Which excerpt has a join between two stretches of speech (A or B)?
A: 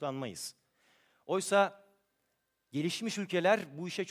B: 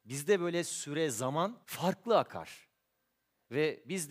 B